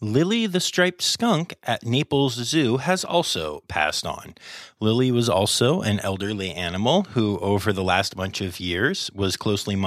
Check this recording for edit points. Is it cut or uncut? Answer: uncut